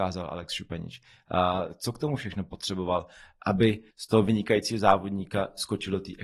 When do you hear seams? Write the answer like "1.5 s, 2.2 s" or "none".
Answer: 3.9 s

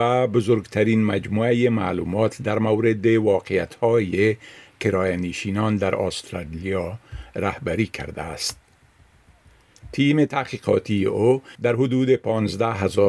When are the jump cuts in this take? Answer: 11.5 s

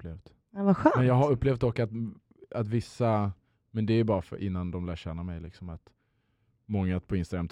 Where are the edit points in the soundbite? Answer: none

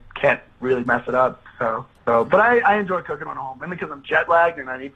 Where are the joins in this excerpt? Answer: 1.9 s

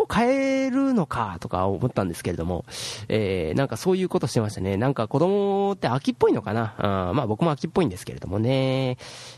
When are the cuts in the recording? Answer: none

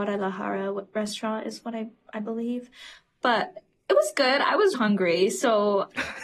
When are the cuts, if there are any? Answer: 4.7 s

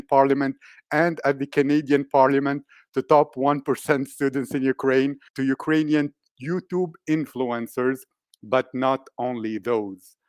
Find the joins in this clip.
5.3 s

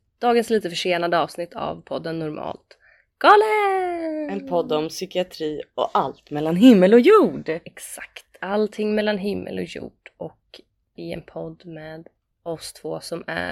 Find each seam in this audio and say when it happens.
11.0 s

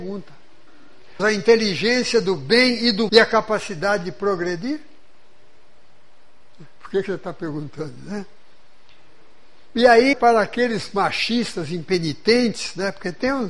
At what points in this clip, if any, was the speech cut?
1.2 s, 3.1 s, 10.1 s

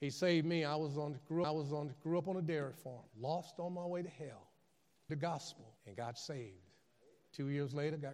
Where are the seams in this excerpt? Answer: 1.4 s, 3.1 s, 5.1 s, 5.8 s

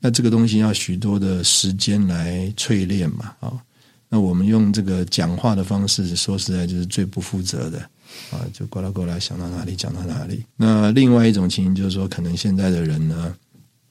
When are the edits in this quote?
3.4 s, 10.5 s

